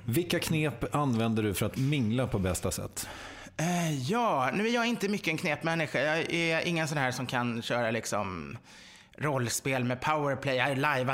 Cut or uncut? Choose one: uncut